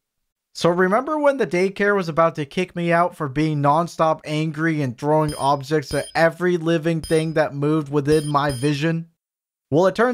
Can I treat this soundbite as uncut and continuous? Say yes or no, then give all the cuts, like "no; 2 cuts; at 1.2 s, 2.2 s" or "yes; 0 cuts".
yes; 0 cuts